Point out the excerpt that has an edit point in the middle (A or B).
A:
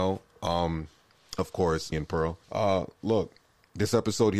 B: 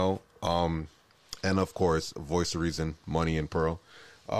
A